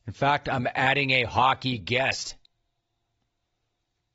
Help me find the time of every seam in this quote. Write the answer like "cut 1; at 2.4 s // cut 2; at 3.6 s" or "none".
none

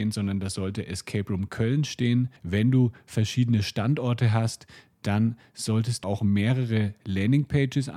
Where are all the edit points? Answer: cut 1; at 2.4 s // cut 2; at 6.0 s

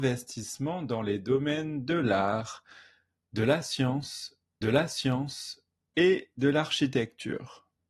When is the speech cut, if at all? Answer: cut 1; at 4.6 s

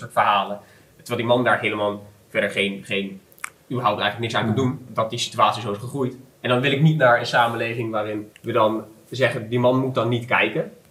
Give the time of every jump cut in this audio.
cut 1; at 4.9 s // cut 2; at 6.3 s // cut 3; at 8.3 s

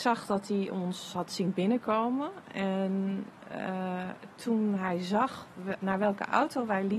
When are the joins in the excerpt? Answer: none

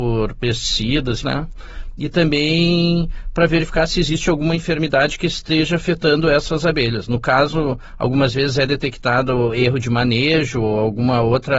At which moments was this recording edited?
cut 1; at 1.2 s

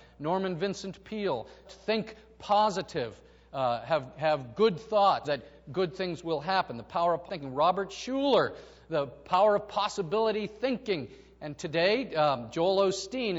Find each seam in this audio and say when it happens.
cut 1; at 1.6 s // cut 2; at 5.2 s // cut 3; at 7.3 s

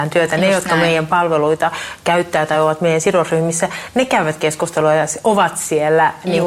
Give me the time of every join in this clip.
none

